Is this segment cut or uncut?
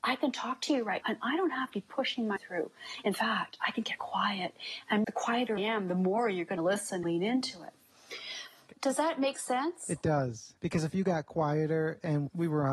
cut